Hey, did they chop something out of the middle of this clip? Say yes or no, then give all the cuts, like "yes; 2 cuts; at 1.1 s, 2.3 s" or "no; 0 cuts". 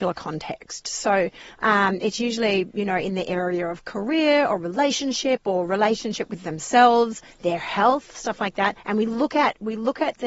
yes; 1 cut; at 8.8 s